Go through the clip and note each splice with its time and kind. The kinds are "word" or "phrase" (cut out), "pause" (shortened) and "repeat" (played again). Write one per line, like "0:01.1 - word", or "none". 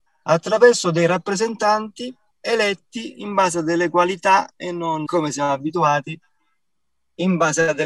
0:02.3 - pause
0:05.1 - word